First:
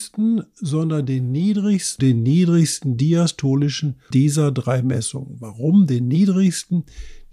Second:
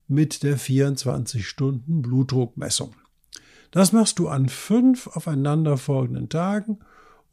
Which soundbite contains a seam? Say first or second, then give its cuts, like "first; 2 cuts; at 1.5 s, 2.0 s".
first; 2 cuts; at 2.0 s, 4.1 s